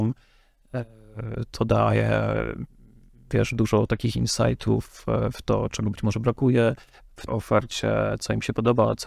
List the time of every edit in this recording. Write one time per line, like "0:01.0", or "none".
0:07.3